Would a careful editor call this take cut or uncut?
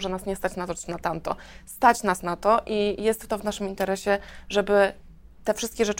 uncut